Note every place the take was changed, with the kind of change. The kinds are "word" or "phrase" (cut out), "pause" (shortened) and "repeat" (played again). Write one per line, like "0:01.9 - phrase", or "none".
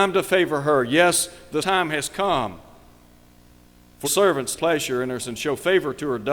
0:01.6 - word
0:04.0 - word
0:04.6 - word
0:05.2 - word